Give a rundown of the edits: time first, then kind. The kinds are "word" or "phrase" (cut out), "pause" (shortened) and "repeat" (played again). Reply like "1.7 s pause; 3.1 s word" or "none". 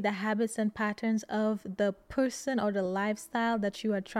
none